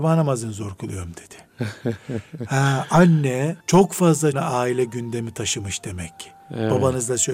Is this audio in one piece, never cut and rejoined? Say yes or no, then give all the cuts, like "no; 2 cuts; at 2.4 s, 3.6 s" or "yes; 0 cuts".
no; 2 cuts; at 3.6 s, 4.3 s